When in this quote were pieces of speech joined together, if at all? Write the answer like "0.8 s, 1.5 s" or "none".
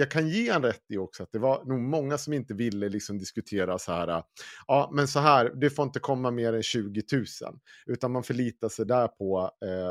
none